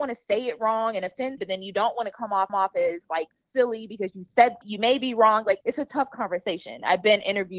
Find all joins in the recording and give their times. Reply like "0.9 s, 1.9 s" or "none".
1.4 s, 2.5 s, 4.6 s, 5.6 s